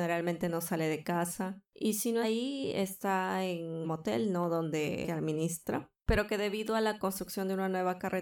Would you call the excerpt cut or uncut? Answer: cut